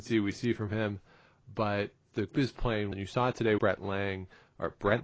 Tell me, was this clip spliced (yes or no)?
yes